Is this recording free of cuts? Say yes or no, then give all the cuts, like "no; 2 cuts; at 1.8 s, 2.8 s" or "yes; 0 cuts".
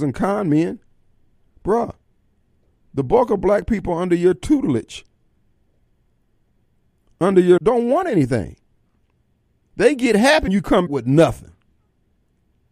no; 3 cuts; at 7.6 s, 10.5 s, 10.9 s